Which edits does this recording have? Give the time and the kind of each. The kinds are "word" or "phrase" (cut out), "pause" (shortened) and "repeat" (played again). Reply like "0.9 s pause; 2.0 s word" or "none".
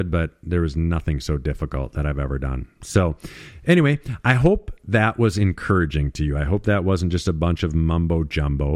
none